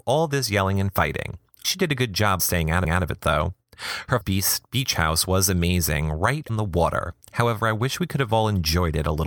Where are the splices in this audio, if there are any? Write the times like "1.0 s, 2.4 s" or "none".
1.6 s, 2.4 s, 2.8 s, 4.2 s, 6.5 s